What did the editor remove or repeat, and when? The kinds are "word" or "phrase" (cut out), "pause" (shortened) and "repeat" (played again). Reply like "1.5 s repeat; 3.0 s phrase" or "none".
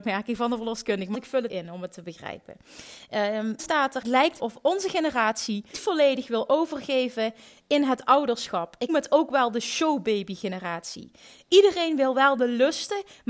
1.1 s word; 1.5 s word; 3.6 s word; 4.0 s word; 4.4 s word; 5.7 s word; 8.9 s word